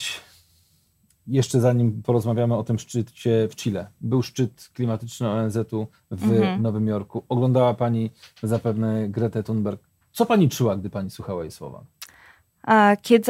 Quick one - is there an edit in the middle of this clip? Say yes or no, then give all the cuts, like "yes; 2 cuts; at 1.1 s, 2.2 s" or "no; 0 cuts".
no; 0 cuts